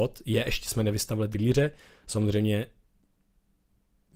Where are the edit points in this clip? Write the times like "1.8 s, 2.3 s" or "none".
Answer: 1.3 s